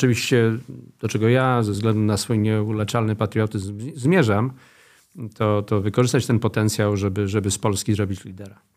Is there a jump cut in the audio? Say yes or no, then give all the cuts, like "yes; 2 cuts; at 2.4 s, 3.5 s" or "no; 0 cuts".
no; 0 cuts